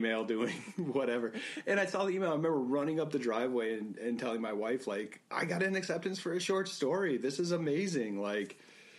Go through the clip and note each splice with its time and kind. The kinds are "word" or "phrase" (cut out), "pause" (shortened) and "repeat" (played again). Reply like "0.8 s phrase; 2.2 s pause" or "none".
5.3 s pause